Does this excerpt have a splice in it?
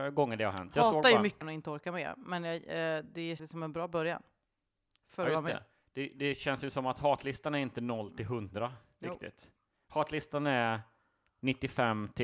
yes; 2 cuts; at 1.4 s, 3.4 s

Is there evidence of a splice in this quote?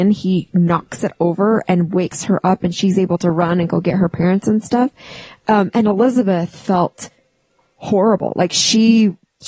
no; 0 cuts

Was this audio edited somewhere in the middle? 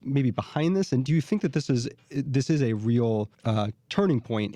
yes; 1 cut; at 3.3 s

